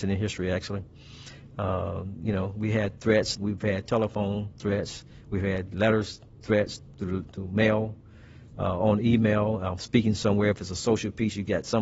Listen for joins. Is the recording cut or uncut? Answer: uncut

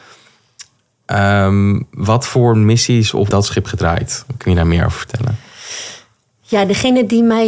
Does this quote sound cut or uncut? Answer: cut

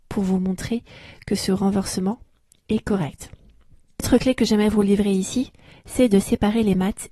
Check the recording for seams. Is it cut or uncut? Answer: uncut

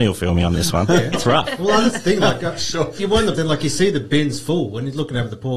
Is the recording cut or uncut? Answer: cut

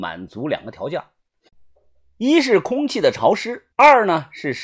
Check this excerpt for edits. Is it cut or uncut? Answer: cut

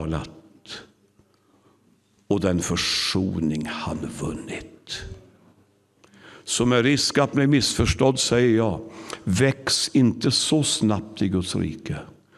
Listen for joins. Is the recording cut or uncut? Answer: uncut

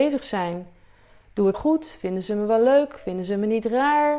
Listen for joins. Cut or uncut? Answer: cut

